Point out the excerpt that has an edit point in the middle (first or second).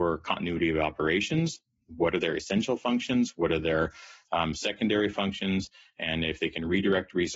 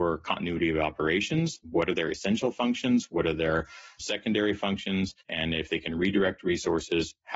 second